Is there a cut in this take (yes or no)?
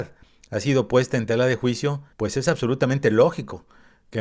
yes